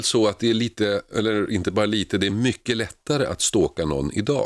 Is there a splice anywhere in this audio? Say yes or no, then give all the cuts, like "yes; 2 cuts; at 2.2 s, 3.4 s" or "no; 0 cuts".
no; 0 cuts